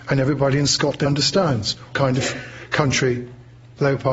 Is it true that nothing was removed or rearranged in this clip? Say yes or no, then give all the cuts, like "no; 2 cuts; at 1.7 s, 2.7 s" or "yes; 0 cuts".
no; 2 cuts; at 1.1 s, 1.9 s